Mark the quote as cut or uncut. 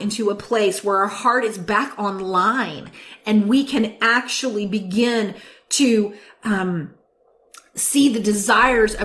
uncut